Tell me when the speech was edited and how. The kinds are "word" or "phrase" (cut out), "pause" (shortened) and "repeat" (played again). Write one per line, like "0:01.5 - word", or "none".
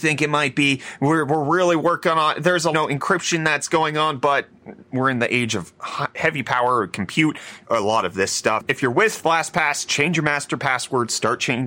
0:02.7 - phrase
0:04.8 - pause
0:07.6 - phrase